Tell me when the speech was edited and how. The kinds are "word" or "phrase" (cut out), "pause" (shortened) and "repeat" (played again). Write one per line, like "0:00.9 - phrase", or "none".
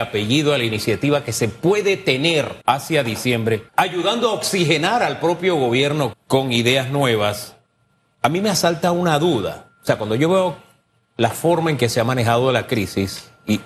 0:02.6 - pause
0:03.7 - pause
0:06.1 - word